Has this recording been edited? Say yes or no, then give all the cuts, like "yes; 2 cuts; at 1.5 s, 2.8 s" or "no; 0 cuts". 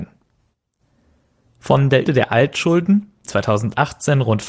yes; 2 cuts; at 2.0 s, 3.2 s